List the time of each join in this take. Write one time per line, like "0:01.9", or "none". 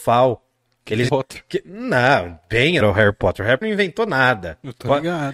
0:01.1
0:02.8
0:03.6